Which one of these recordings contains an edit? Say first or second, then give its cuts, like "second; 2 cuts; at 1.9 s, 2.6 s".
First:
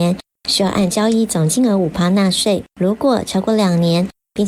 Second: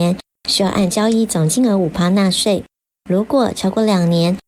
first; 1 cut; at 2.7 s